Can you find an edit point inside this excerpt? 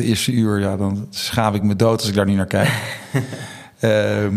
no; 0 cuts

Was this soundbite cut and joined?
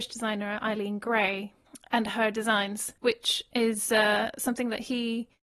yes; 1 cut; at 3.0 s

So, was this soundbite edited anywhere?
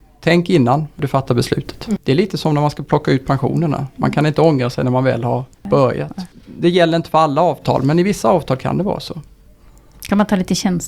no; 0 cuts

